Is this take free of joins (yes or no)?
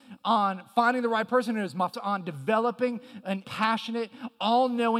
no